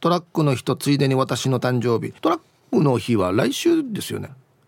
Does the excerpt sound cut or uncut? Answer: cut